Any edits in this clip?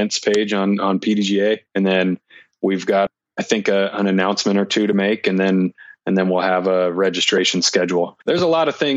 no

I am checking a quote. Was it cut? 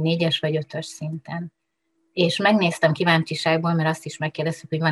no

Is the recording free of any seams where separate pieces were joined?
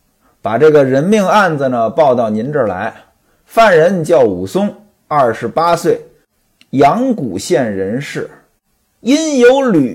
yes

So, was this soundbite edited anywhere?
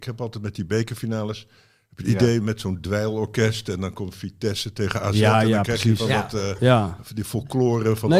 no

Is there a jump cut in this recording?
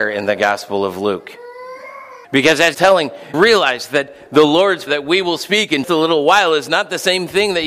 yes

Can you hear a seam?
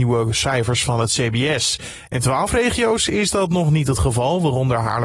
no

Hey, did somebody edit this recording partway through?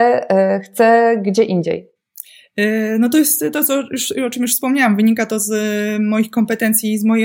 no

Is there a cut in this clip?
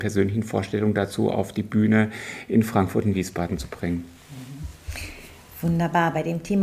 no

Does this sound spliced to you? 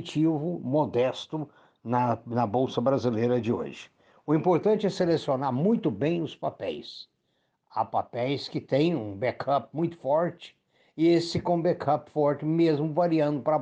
no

